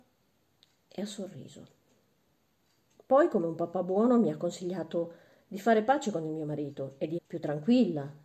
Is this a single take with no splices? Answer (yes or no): no